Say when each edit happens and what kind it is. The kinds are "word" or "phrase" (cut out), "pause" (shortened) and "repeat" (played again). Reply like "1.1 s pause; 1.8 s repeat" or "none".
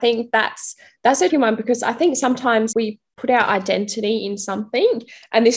1.3 s word; 2.7 s word